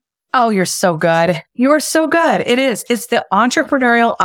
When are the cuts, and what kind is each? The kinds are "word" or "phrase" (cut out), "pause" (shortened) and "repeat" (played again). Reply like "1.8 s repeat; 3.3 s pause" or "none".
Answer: none